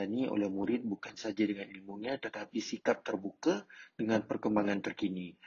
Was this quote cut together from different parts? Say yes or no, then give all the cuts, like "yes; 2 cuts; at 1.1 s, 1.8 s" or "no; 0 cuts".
no; 0 cuts